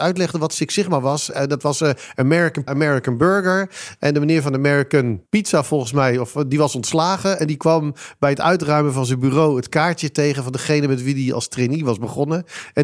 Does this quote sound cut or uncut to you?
cut